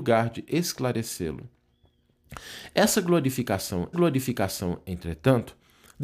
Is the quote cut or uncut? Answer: cut